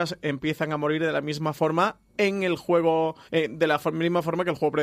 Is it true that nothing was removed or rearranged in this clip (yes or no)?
no